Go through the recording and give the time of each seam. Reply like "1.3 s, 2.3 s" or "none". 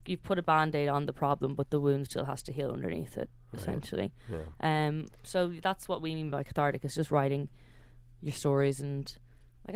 none